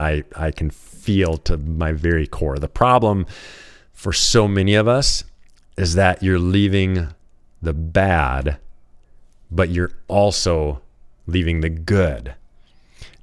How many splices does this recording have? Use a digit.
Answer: 0